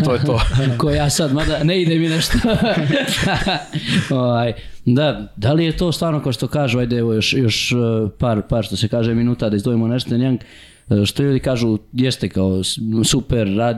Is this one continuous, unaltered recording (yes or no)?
yes